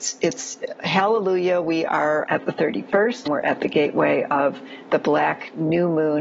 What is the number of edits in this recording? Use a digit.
2